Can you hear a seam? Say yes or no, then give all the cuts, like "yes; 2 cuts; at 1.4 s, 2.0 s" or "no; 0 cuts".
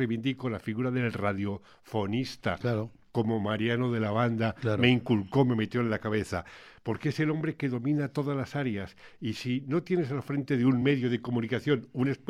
no; 0 cuts